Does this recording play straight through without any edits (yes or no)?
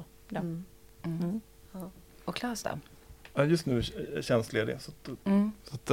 yes